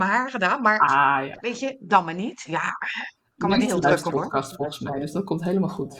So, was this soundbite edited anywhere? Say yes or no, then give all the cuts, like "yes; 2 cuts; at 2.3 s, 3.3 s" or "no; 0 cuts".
yes; 3 cuts; at 1.3 s, 3.7 s, 4.1 s